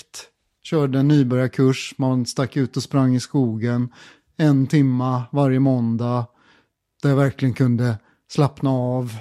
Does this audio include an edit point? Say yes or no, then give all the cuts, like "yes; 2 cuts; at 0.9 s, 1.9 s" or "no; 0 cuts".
no; 0 cuts